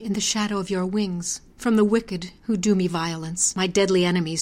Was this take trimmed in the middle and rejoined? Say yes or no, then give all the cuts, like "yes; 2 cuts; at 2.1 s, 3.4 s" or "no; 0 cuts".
yes; 2 cuts; at 1.5 s, 2.4 s